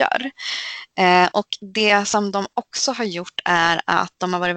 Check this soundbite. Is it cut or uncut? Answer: uncut